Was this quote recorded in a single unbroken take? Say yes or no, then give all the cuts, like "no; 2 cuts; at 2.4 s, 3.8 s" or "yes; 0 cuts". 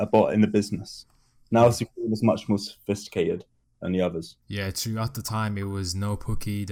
no; 1 cut; at 4.4 s